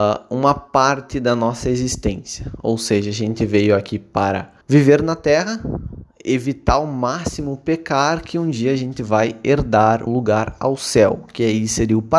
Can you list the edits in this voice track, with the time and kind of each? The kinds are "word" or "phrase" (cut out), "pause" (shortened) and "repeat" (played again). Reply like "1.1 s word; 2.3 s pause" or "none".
4.6 s pause; 10.1 s word

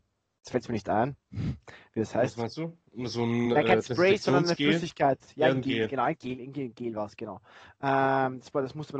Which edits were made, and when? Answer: none

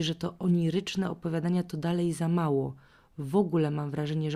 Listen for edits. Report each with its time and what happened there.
none

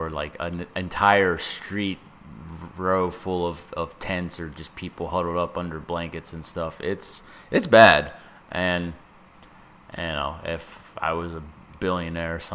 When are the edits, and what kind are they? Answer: none

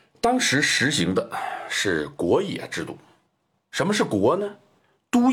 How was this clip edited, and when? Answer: 3.2 s pause

